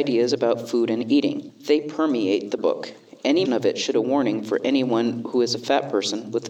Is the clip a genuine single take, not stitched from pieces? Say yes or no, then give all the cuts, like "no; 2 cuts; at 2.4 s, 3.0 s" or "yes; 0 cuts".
no; 3 cuts; at 2.6 s, 3.5 s, 3.9 s